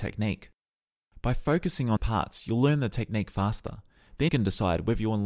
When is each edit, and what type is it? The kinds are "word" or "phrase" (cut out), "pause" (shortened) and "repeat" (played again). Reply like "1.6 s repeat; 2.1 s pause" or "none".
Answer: 2.0 s word; 4.3 s word